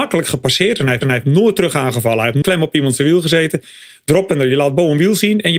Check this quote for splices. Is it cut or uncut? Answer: cut